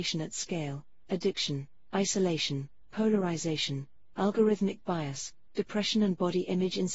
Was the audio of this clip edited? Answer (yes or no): no